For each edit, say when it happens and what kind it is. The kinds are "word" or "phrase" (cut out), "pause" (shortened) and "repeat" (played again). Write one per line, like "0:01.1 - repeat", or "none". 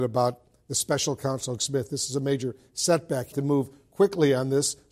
0:01.6 - word
0:03.3 - word